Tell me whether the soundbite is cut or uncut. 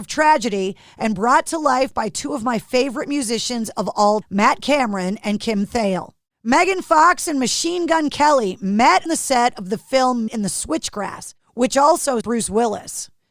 cut